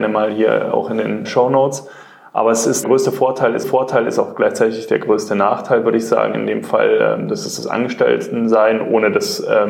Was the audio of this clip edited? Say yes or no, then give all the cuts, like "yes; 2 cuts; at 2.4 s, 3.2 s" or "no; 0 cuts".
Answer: yes; 3 cuts; at 1.2 s, 2.8 s, 3.6 s